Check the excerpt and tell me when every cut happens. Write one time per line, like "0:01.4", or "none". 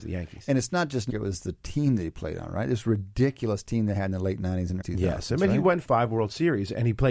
0:01.1
0:04.8
0:05.8